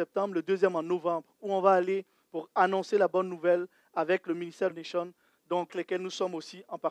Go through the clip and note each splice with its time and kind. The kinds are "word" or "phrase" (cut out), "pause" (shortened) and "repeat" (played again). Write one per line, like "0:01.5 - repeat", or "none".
0:04.7 - phrase
0:05.7 - word

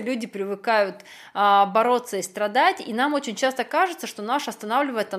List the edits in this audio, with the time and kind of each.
none

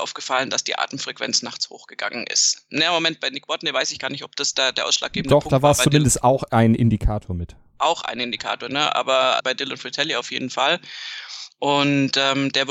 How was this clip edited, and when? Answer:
0:09.4 - word

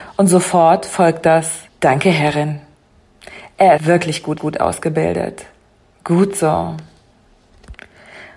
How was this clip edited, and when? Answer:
0:01.7 - pause
0:03.8 - word
0:04.4 - repeat

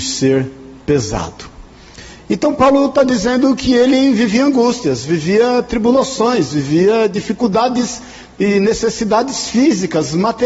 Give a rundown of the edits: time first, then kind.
none

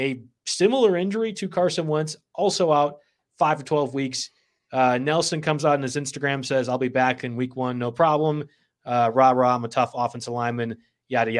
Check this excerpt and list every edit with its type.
none

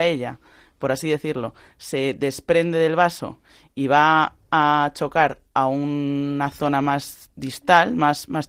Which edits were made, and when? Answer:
none

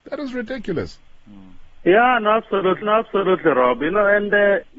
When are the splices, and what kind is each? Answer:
0:02.8 - repeat

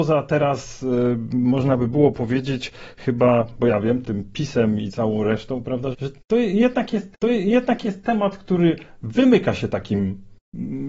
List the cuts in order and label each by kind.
0:05.9 - word
0:07.1 - repeat

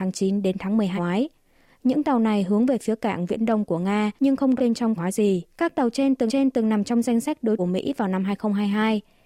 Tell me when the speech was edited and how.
0:01.0 - word
0:03.3 - word
0:04.2 - pause
0:04.6 - word
0:05.0 - phrase
0:05.5 - pause
0:06.3 - repeat
0:07.6 - phrase

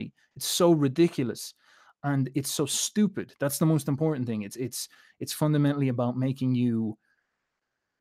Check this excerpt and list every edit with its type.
none

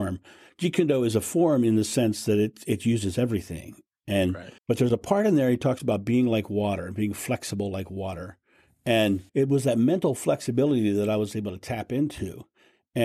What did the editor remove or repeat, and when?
0:04.6 - pause
0:09.3 - pause

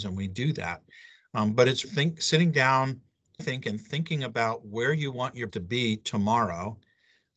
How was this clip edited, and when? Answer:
0:01.8 - word
0:03.4 - word
0:05.5 - word

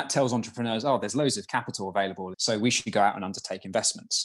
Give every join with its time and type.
0:02.3 - phrase

